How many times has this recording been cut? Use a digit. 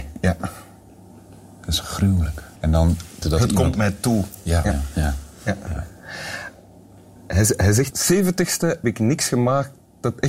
5